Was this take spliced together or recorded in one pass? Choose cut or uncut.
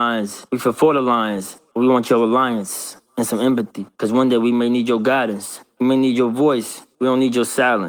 uncut